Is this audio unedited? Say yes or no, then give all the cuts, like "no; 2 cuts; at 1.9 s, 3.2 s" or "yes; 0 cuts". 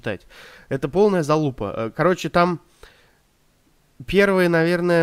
yes; 0 cuts